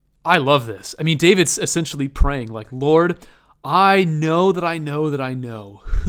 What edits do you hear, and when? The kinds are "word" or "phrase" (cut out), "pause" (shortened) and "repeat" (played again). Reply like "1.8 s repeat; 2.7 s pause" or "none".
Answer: none